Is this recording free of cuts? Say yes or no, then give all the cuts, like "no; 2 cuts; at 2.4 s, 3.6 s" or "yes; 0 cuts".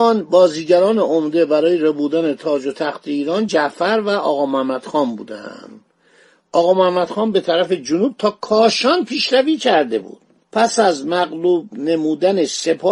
yes; 0 cuts